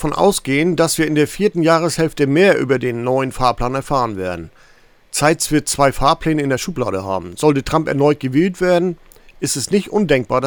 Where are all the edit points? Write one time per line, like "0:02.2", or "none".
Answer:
none

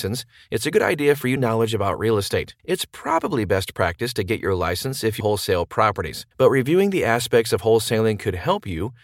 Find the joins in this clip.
0:01.4
0:02.6
0:05.2
0:06.3

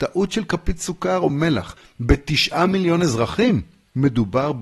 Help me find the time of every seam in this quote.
none

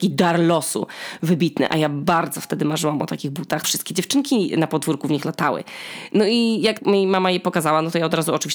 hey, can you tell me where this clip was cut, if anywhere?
0:03.6
0:06.8

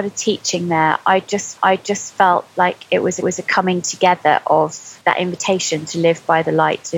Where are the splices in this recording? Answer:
0:01.6
0:03.2
0:05.0

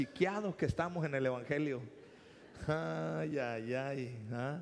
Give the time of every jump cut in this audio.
none

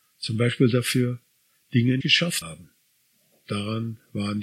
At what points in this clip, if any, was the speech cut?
0:02.0
0:02.4

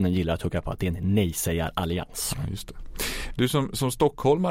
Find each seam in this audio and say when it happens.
none

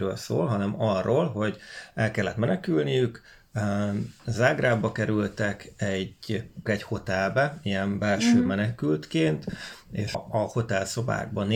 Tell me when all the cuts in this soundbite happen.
0:06.7
0:10.1

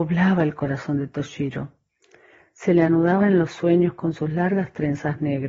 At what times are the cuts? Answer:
none

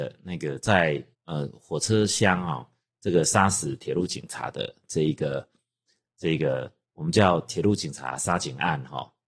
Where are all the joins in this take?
0:01.1

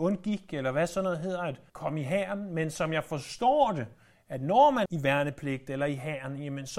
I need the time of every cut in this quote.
0:01.7
0:04.9

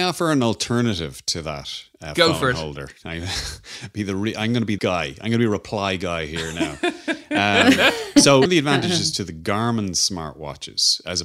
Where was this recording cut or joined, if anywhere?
0:04.8
0:08.5

